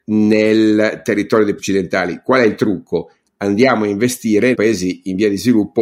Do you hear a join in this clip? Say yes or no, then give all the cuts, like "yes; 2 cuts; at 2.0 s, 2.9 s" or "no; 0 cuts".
yes; 2 cuts; at 1.6 s, 4.5 s